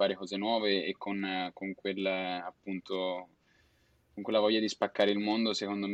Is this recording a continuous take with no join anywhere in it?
yes; 0 cuts

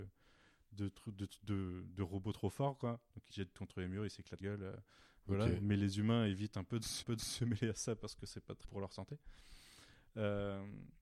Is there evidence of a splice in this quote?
yes; 4 cuts; at 3.3 s, 4.4 s, 7.0 s, 8.6 s

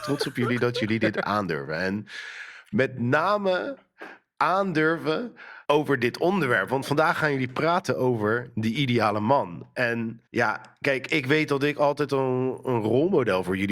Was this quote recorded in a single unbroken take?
no; 2 cuts; at 5.6 s, 10.3 s

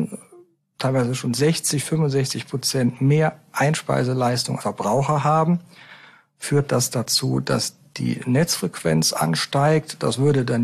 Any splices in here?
yes; 1 cut; at 4.6 s

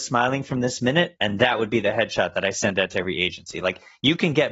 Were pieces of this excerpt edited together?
no; 0 cuts

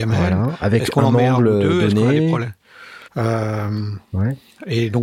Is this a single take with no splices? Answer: no; 1 cut; at 3.1 s

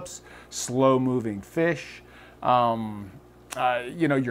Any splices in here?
no; 0 cuts

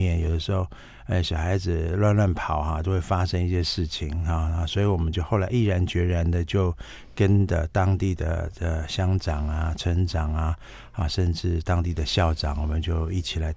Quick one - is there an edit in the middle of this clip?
no; 0 cuts

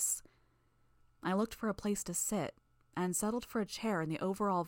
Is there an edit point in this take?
no; 0 cuts

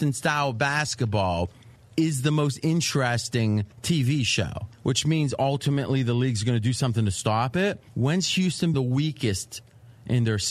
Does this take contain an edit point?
yes; 3 cuts; at 3.7 s, 7.9 s, 8.7 s

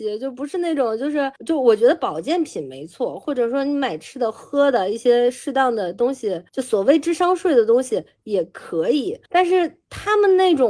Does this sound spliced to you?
yes; 3 cuts; at 1.4 s, 6.5 s, 9.2 s

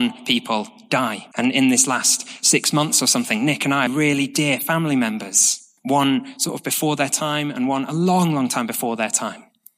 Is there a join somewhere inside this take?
yes; 3 cuts; at 1.3 s, 3.9 s, 5.8 s

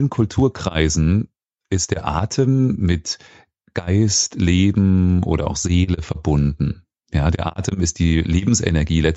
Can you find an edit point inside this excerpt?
no; 0 cuts

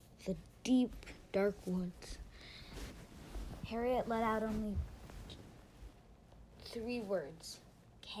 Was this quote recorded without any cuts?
no; 1 cut; at 6.5 s

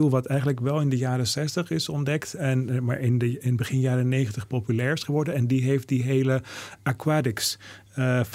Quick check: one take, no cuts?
yes; 0 cuts

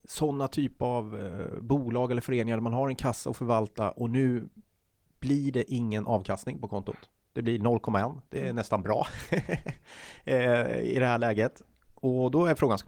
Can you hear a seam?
no; 0 cuts

